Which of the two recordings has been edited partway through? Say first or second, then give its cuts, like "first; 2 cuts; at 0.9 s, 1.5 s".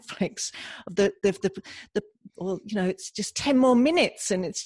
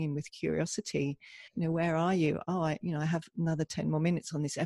second; 1 cut; at 1.5 s